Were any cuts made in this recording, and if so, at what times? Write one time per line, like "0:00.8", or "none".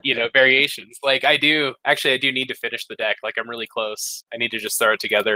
0:01.8
0:04.3